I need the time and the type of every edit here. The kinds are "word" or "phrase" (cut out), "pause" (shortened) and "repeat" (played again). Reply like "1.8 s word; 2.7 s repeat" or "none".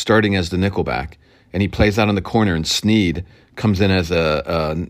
none